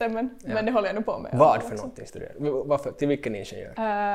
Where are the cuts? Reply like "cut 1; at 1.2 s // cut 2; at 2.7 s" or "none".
none